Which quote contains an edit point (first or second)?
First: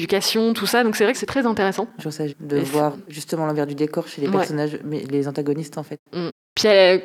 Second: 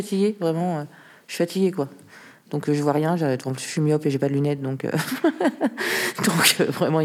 first